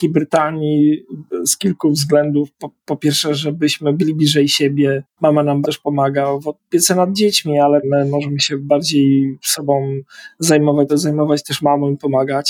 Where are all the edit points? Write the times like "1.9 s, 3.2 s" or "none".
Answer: 5.6 s, 7.8 s, 10.9 s